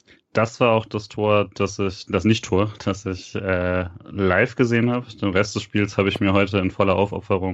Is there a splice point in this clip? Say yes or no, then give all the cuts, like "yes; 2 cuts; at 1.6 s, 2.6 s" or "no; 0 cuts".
no; 0 cuts